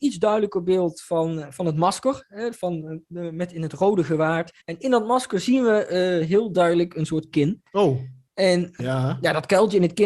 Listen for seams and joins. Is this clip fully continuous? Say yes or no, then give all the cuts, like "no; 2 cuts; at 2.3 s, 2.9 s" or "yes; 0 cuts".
no; 3 cuts; at 4.6 s, 7.3 s, 8.8 s